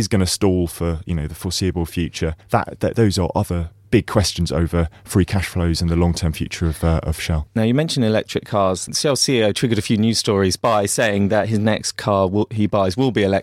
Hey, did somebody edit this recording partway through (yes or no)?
yes